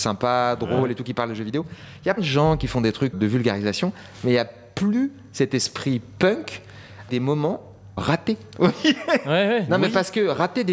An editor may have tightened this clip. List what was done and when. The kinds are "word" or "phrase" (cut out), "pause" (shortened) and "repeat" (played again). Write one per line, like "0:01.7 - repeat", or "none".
0:02.2 - word
0:03.1 - word
0:07.1 - word
0:08.0 - word